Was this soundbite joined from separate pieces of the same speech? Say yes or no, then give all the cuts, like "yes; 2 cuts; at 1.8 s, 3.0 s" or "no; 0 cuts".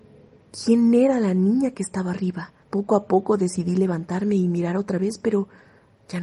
yes; 1 cut; at 2.6 s